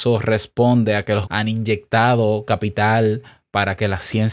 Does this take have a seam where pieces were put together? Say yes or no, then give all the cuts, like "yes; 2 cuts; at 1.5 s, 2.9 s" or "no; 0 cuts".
yes; 1 cut; at 1.2 s